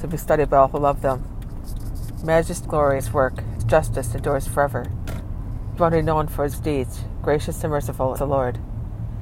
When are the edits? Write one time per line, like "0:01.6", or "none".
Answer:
0:02.6
0:03.0
0:03.6
0:05.8
0:06.5
0:08.2